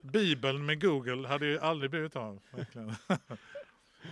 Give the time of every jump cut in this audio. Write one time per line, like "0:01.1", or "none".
none